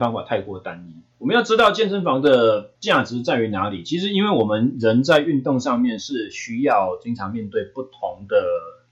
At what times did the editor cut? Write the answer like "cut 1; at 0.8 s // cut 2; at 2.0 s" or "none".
cut 1; at 1.1 s // cut 2; at 2.7 s

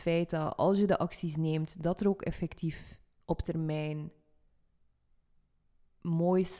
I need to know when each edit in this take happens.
none

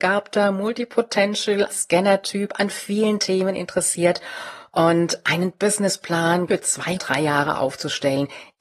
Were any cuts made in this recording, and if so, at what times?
cut 1; at 1.7 s // cut 2; at 6.5 s // cut 3; at 7.0 s

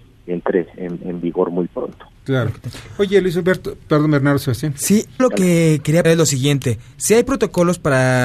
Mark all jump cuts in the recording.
cut 1; at 2.1 s // cut 2; at 5.2 s // cut 3; at 6.0 s

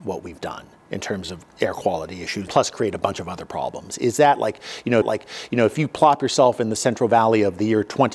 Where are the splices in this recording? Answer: cut 1; at 1.5 s // cut 2; at 2.5 s // cut 3; at 5.0 s

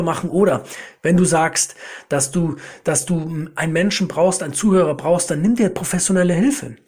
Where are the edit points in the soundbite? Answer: none

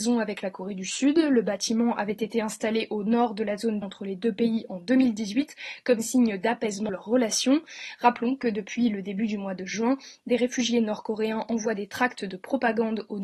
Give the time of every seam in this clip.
cut 1; at 3.8 s // cut 2; at 6.9 s

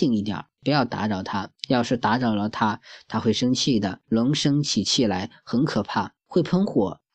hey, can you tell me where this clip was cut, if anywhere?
cut 1; at 1.6 s // cut 2; at 4.0 s

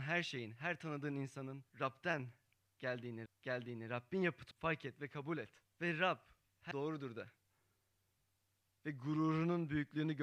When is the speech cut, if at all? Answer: cut 1; at 1.7 s // cut 2; at 3.3 s // cut 3; at 4.5 s // cut 4; at 5.7 s // cut 5; at 6.7 s

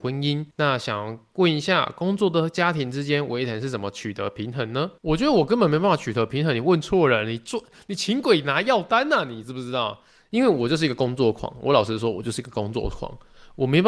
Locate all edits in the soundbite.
none

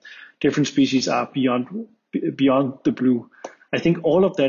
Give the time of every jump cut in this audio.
none

